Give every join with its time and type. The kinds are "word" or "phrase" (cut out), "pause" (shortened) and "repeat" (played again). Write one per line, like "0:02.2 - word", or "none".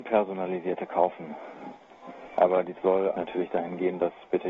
0:02.7 - word
0:03.1 - word